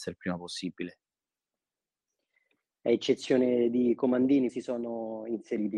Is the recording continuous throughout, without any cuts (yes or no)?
no